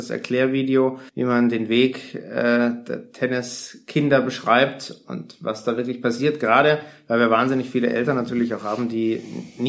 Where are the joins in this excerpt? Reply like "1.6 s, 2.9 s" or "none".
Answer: 1.1 s